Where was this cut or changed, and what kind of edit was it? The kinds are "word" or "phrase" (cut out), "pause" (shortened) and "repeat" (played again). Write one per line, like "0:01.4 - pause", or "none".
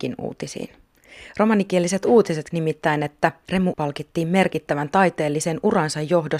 0:02.5 - word
0:03.7 - word